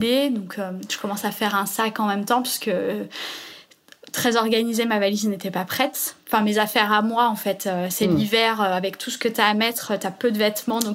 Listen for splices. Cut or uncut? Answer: uncut